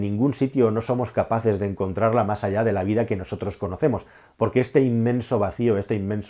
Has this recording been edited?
no; 0 cuts

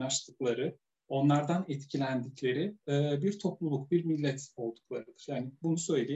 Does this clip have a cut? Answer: no; 0 cuts

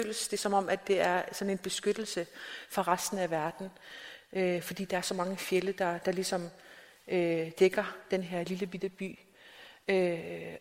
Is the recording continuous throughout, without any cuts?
yes; 0 cuts

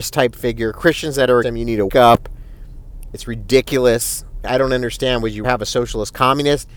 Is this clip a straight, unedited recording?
no; 4 cuts; at 1.4 s, 1.9 s, 4.4 s, 5.4 s

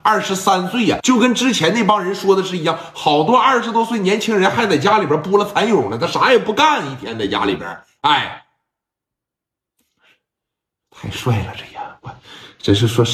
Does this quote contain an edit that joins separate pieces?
yes; 1 cut; at 1.0 s

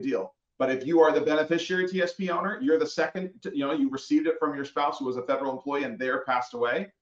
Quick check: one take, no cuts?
yes; 0 cuts

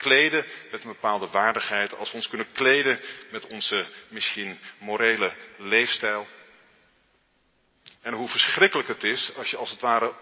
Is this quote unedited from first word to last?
yes; 0 cuts

